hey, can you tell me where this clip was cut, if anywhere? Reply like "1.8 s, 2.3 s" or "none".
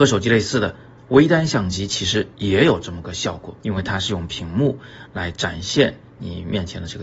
3.6 s